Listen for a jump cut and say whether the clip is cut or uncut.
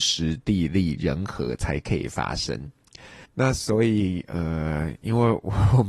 cut